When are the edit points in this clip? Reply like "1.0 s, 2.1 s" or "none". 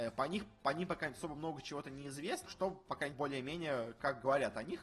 2.5 s, 3.1 s